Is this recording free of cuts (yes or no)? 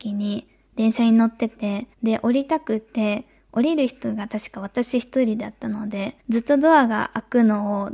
no